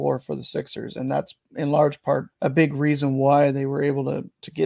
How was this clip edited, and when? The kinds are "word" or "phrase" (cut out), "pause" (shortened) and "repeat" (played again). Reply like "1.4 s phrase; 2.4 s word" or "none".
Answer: 1.4 s pause; 2.3 s pause